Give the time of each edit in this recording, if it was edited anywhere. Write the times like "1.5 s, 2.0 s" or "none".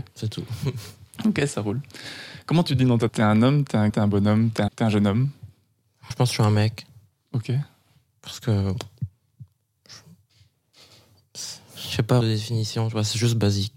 2.7 s, 3.1 s, 3.9 s, 4.7 s, 6.1 s, 12.2 s